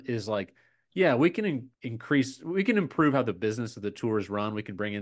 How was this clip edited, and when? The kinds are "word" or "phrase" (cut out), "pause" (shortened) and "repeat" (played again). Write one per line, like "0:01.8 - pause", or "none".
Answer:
0:01.7 - pause